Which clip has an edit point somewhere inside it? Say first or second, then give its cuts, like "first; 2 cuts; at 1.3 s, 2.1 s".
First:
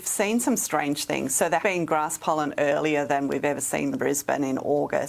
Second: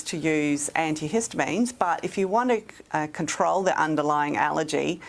first; 2 cuts; at 1.6 s, 3.9 s